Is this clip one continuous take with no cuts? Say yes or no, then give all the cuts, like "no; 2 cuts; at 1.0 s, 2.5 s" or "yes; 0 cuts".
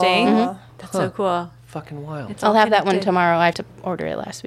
no; 1 cut; at 3.5 s